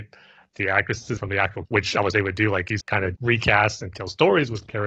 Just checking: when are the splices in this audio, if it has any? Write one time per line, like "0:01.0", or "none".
0:01.2
0:01.6
0:02.1
0:02.8
0:03.1
0:03.9